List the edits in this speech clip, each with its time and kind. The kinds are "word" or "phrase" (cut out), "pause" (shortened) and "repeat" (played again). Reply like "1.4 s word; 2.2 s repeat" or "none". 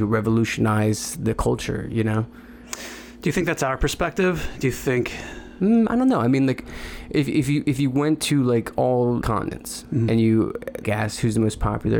9.2 s word; 10.8 s word